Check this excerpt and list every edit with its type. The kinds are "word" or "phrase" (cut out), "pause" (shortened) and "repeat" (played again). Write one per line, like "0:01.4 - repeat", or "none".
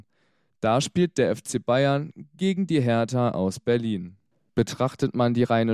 none